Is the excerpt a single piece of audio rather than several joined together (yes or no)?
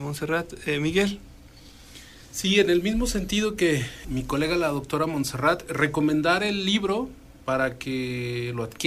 no